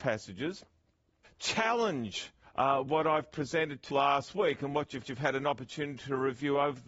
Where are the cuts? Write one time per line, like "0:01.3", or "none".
0:01.2
0:02.4
0:03.9
0:05.0